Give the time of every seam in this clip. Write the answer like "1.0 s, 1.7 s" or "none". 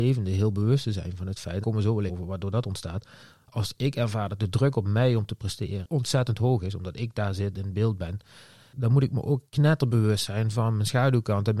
1.6 s, 2.1 s, 9.5 s